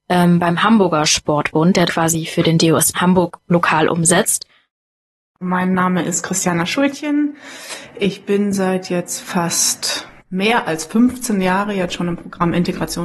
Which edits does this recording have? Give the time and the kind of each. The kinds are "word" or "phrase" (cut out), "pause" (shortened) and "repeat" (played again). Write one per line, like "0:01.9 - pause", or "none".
0:01.9 - word
0:02.9 - word
0:10.2 - word